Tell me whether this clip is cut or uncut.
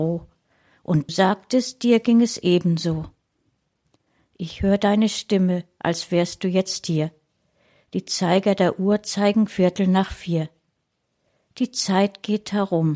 cut